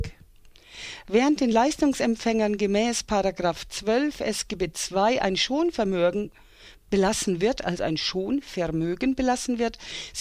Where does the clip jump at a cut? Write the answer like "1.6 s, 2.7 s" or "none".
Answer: none